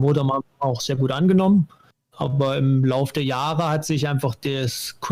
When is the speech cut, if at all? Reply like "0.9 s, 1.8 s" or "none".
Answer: none